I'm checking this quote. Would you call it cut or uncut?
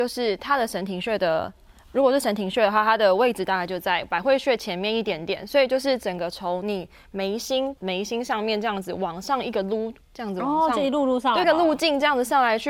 cut